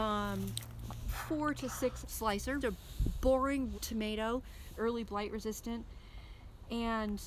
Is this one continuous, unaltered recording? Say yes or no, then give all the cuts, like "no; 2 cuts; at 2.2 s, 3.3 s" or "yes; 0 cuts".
no; 4 cuts; at 2.0 s, 2.6 s, 3.7 s, 4.8 s